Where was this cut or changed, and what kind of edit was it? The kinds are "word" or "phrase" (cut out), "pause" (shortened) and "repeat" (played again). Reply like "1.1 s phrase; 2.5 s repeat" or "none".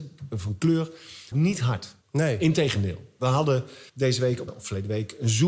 1.3 s phrase; 2.0 s pause; 3.9 s pause; 4.5 s phrase